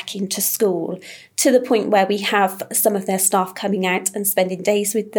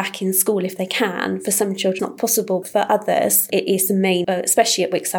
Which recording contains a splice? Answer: second; 3 cuts; at 2.0 s, 2.6 s, 4.2 s

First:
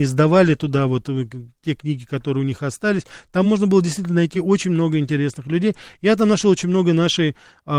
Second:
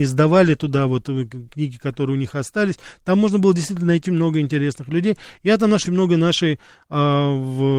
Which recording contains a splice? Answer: second; 3 cuts; at 1.5 s, 4.1 s, 5.9 s

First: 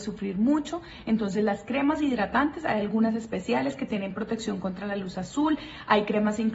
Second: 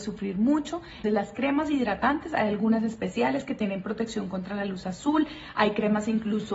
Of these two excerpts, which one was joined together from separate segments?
second; 1 cut; at 1.0 s

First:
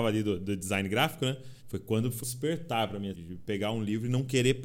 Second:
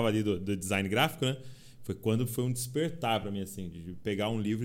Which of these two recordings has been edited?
first; 3 cuts; at 1.6 s, 2.2 s, 3.1 s

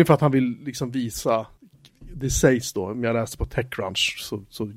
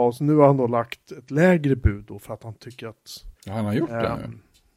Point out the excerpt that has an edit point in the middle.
second; 1 cut; at 3.4 s

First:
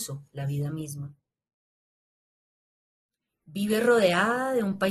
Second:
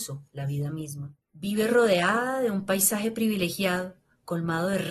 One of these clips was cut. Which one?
second; 1 cut; at 1.2 s

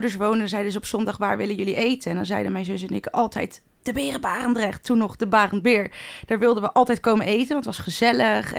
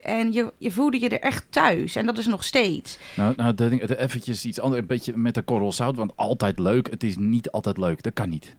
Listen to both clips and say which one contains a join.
second; 1 cut; at 3.4 s

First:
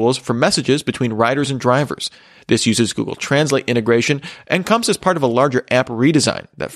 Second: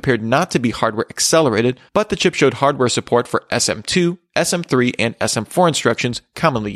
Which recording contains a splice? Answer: second; 1 cut; at 1.9 s

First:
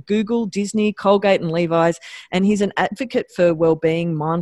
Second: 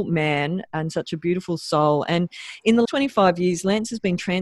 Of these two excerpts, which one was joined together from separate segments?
second; 1 cut; at 2.8 s

